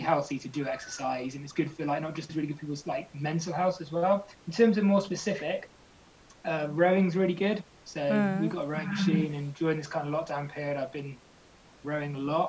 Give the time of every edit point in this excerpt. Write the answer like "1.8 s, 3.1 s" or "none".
2.3 s, 4.3 s